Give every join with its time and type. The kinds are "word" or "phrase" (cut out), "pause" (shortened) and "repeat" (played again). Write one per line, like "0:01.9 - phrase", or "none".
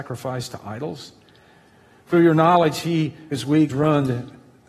0:02.1 - word
0:03.3 - word
0:03.7 - word